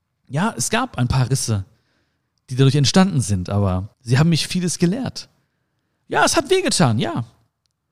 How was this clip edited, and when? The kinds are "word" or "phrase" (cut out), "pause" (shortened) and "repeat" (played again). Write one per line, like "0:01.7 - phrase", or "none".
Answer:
0:03.9 - pause
0:04.5 - word